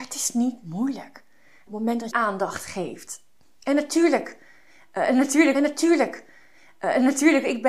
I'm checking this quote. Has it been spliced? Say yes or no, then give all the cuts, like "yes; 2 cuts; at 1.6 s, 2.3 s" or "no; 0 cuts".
yes; 3 cuts; at 1.7 s, 2.1 s, 5.5 s